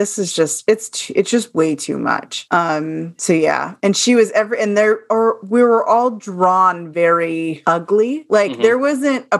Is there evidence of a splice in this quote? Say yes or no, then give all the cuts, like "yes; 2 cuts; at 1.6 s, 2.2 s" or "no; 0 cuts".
no; 0 cuts